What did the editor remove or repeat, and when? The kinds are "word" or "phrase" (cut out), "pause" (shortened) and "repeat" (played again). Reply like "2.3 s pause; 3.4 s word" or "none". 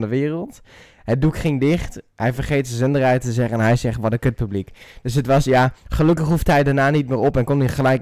5.8 s pause